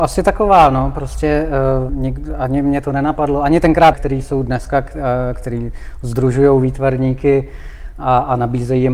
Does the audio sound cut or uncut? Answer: cut